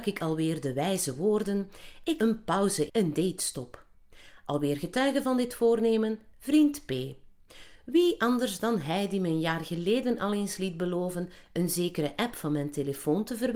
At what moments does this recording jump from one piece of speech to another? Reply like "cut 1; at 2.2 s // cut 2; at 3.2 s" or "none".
cut 1; at 2.2 s // cut 2; at 2.9 s